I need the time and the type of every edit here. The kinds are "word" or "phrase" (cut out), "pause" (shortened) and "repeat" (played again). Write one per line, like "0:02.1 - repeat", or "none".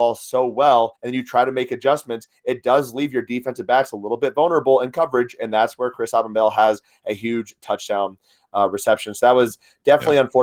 0:01.0 - pause